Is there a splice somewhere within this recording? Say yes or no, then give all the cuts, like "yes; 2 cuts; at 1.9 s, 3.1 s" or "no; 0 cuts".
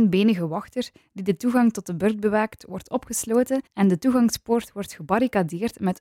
yes; 1 cut; at 3.7 s